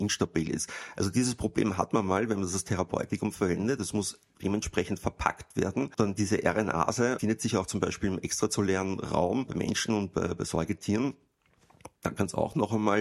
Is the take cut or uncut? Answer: uncut